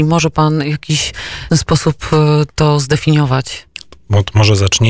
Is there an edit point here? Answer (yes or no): yes